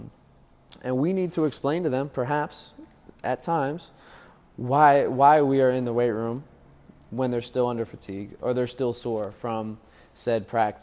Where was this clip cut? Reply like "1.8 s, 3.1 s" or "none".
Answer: none